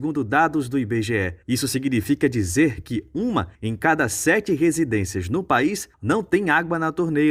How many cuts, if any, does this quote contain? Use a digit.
3